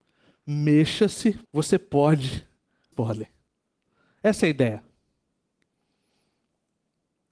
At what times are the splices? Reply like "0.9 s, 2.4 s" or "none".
1.4 s, 2.9 s